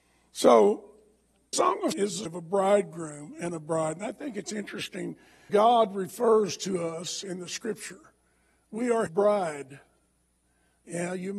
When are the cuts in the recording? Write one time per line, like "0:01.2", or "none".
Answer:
0:01.5
0:01.9
0:02.2
0:05.5
0:09.1